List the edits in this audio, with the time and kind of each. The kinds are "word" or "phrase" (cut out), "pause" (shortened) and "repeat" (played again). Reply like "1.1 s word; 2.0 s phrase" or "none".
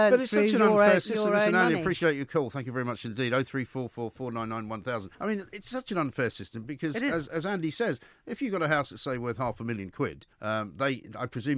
5.1 s pause; 10.3 s pause